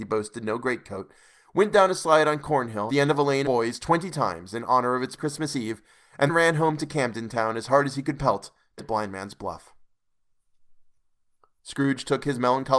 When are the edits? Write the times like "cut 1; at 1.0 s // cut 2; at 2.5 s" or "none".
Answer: cut 1; at 2.9 s // cut 2; at 3.4 s // cut 3; at 5.2 s // cut 4; at 6.3 s // cut 5; at 8.8 s